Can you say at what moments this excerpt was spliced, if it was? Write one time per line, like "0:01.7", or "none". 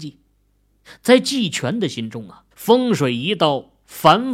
0:02.5